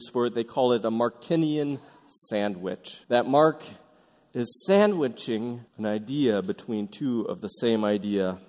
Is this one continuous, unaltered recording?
no; 2 cuts; at 3.0 s, 5.7 s

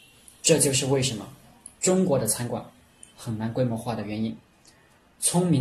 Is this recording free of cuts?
yes; 0 cuts

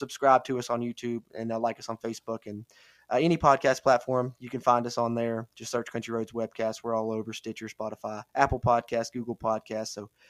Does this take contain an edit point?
yes; 1 cut; at 8.3 s

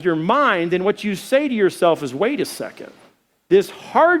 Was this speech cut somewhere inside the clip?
no; 0 cuts

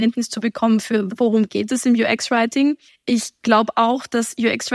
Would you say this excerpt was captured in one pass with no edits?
no; 2 cuts; at 1.1 s, 2.9 s

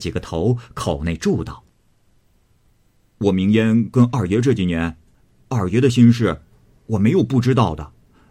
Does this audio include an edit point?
no; 0 cuts

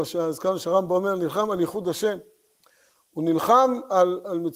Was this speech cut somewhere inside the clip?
no; 0 cuts

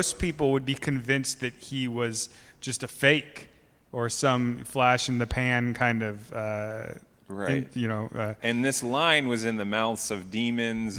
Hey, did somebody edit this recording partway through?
no; 0 cuts

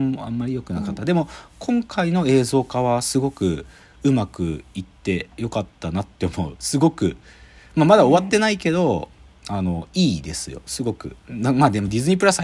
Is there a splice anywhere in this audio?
no; 0 cuts

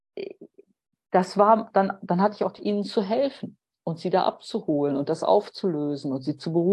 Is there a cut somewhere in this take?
yes; 1 cut; at 2.6 s

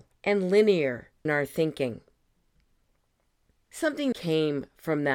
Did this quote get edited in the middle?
yes; 2 cuts; at 1.3 s, 4.1 s

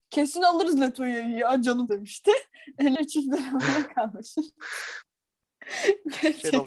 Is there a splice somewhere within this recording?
yes; 3 cuts; at 1.9 s, 2.9 s, 5.1 s

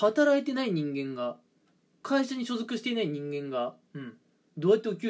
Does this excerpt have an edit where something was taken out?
no; 0 cuts

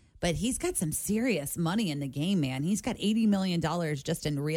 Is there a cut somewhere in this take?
no; 0 cuts

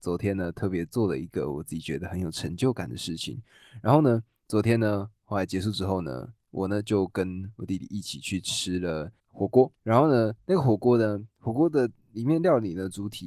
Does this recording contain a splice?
yes; 3 cuts; at 6.4 s, 9.2 s, 9.8 s

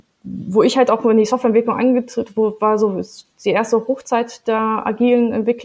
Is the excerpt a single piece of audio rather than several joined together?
yes; 0 cuts

